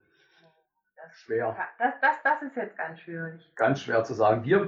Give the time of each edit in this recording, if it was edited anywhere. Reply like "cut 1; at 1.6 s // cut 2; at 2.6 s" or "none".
none